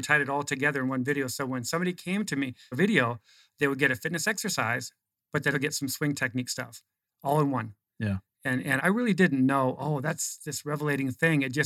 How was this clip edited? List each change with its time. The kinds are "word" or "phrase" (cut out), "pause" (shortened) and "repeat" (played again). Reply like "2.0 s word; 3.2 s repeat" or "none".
2.7 s word; 5.5 s word; 8.8 s word